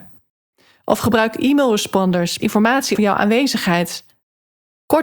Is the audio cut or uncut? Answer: cut